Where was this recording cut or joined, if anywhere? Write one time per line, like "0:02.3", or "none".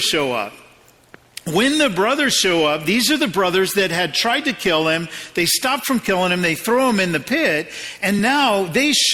none